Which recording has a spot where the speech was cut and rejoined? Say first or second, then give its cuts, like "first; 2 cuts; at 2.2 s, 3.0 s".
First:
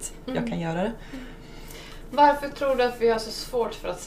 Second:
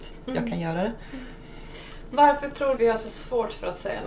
second; 1 cut; at 2.8 s